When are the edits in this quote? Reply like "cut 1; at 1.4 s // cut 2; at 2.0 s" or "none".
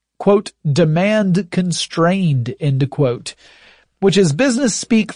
none